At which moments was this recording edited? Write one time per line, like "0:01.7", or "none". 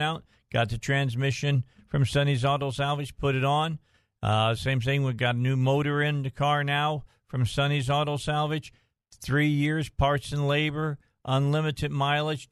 none